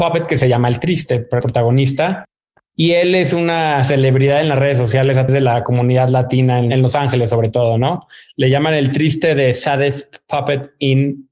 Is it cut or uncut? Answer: cut